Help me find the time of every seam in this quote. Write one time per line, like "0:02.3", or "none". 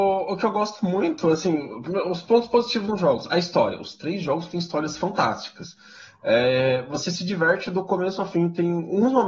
none

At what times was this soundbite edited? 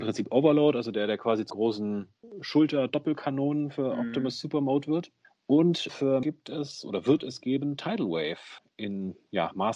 0:01.5
0:05.9
0:06.2

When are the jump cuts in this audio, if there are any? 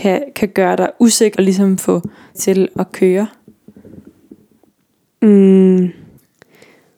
0:01.4
0:02.3
0:02.7

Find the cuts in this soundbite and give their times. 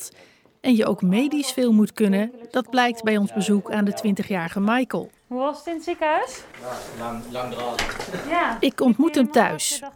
0:05.2
0:06.5

